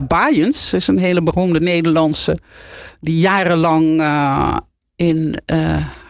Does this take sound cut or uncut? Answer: uncut